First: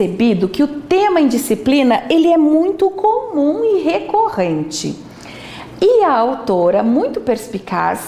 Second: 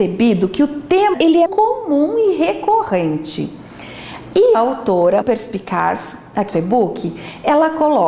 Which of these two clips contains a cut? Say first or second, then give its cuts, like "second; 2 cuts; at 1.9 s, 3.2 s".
second; 5 cuts; at 1.1 s, 1.5 s, 4.5 s, 5.2 s, 6.5 s